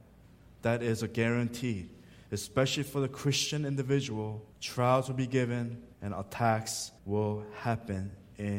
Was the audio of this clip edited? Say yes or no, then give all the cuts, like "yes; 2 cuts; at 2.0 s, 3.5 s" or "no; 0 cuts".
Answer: yes; 3 cuts; at 4.5 s, 5.9 s, 7.0 s